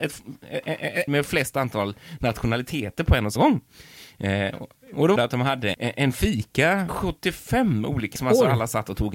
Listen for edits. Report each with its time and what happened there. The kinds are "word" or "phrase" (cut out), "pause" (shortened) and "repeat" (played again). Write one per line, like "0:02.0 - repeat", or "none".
0:01.1 - phrase
0:03.4 - word
0:05.2 - word
0:05.7 - word
0:06.9 - word
0:08.2 - word